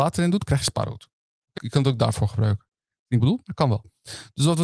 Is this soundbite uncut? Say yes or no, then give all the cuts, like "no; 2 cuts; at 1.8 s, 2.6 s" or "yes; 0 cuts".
no; 2 cuts; at 1.6 s, 3.2 s